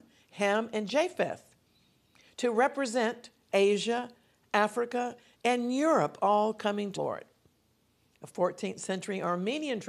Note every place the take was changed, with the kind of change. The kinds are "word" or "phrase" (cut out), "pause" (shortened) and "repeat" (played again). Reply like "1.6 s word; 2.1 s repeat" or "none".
7.0 s word